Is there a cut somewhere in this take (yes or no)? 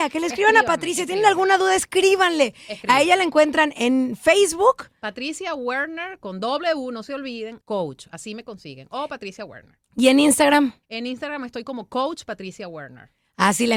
yes